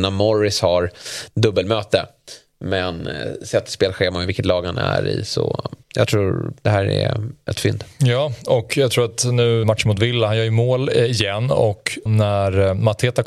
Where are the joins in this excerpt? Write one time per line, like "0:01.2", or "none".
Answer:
0:05.8
0:09.6
0:12.1